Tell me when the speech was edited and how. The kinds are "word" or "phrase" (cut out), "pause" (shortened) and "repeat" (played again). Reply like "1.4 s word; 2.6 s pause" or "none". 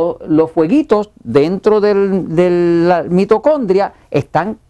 none